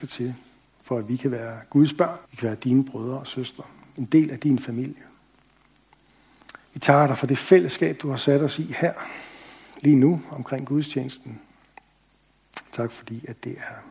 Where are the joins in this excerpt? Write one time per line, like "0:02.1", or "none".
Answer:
0:02.3
0:06.7